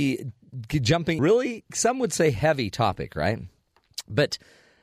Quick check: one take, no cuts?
no; 1 cut; at 1.2 s

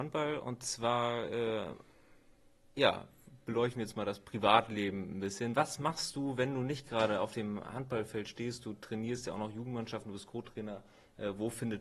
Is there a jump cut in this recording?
no; 0 cuts

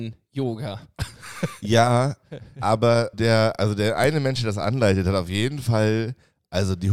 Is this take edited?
yes; 1 cut; at 3.1 s

